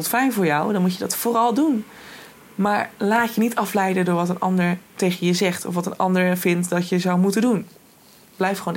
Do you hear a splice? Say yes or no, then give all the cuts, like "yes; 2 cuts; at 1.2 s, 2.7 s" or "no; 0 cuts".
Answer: no; 0 cuts